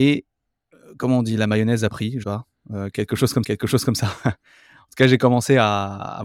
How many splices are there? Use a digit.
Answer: 2